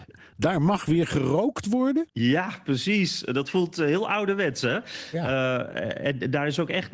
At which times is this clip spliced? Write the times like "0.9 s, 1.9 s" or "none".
2.1 s